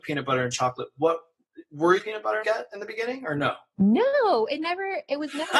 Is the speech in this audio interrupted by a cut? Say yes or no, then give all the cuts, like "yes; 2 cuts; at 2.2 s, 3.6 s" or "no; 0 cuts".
yes; 2 cuts; at 2.0 s, 2.4 s